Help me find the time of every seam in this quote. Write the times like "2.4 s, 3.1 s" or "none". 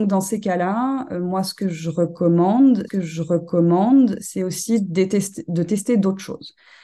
2.9 s